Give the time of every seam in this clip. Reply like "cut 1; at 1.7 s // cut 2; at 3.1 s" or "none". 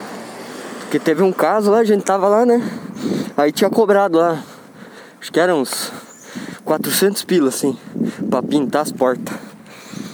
none